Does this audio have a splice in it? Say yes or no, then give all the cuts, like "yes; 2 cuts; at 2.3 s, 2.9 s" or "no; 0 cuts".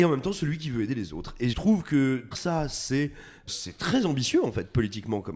yes; 3 cuts; at 1.5 s, 2.3 s, 3.5 s